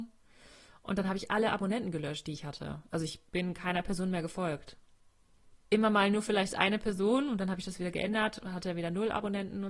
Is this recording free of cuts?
no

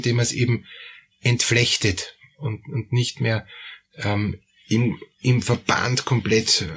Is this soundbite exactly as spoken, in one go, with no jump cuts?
yes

